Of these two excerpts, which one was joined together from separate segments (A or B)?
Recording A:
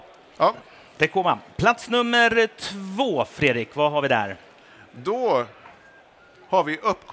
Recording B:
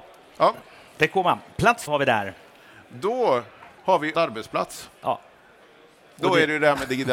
B